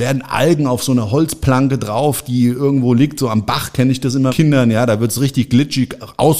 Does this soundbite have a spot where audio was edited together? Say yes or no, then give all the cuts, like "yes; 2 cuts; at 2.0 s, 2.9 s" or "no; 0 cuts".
yes; 1 cut; at 4.3 s